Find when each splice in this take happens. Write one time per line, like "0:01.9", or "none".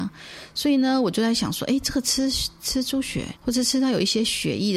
0:03.4